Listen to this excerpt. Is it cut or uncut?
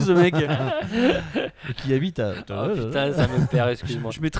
uncut